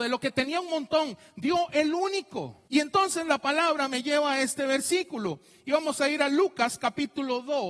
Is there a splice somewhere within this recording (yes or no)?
yes